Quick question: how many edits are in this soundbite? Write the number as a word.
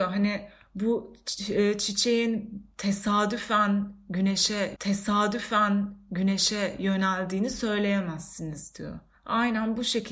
two